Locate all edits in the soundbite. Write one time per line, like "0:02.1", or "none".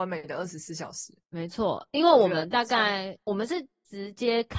0:01.2